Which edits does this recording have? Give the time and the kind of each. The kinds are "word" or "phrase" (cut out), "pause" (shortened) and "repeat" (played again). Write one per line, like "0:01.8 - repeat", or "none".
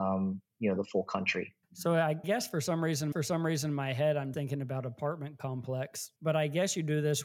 0:01.6 - pause
0:02.2 - word
0:03.1 - repeat
0:04.3 - word
0:06.2 - pause